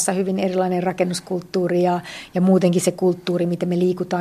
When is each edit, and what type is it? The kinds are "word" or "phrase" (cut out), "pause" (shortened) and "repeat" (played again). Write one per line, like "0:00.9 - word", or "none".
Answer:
none